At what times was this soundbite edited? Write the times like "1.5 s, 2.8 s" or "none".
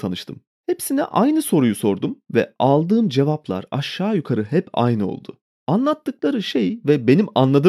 none